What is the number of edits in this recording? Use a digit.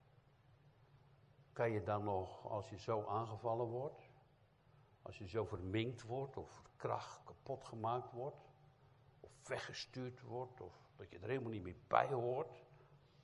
1